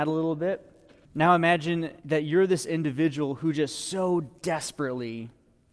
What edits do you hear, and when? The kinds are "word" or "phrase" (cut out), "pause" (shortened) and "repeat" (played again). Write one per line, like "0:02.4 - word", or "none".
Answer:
0:01.0 - pause
0:02.0 - pause